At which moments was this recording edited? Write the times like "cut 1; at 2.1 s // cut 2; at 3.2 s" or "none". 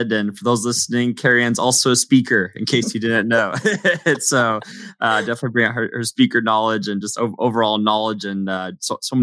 none